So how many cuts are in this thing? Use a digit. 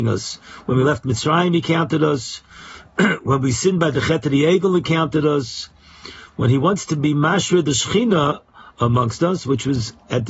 0